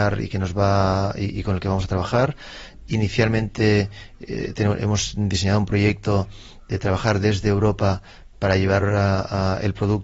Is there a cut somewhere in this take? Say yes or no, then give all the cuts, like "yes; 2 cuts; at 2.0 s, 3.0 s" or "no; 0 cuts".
no; 0 cuts